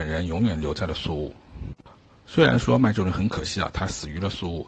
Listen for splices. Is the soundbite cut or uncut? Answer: uncut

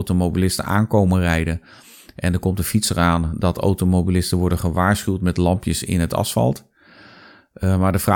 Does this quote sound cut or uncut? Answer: uncut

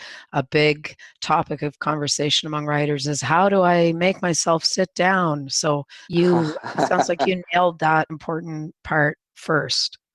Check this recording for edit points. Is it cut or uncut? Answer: cut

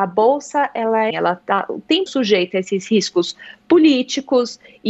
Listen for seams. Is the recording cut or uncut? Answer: cut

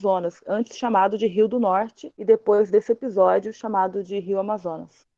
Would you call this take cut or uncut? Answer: cut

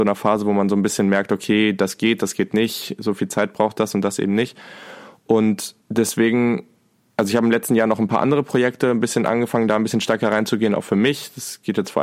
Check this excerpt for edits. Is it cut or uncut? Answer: cut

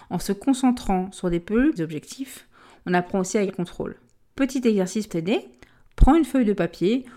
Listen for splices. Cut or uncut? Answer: cut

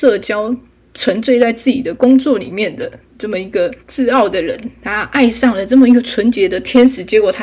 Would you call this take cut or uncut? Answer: cut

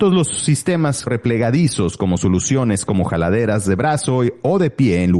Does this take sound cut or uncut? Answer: cut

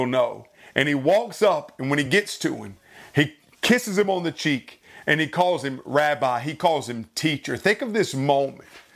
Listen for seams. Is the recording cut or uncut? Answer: uncut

